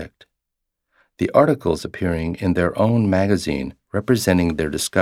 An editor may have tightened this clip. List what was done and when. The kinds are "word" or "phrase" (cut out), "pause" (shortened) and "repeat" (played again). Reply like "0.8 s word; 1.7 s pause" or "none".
none